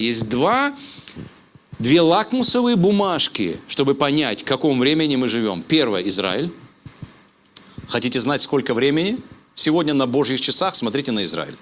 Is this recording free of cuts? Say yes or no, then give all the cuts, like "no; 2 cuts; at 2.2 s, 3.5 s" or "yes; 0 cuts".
yes; 0 cuts